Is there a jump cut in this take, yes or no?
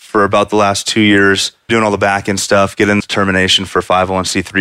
yes